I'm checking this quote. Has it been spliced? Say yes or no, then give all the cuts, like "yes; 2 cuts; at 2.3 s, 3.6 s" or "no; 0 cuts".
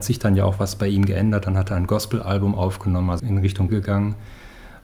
yes; 2 cuts; at 3.2 s, 3.7 s